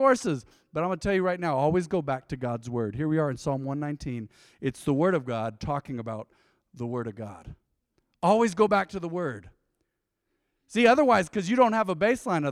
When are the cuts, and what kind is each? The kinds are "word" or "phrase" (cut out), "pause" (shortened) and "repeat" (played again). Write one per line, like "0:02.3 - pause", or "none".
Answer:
none